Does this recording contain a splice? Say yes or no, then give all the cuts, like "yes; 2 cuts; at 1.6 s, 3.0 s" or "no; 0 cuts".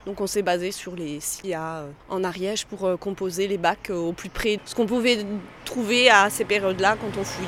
yes; 3 cuts; at 1.4 s, 2.0 s, 4.6 s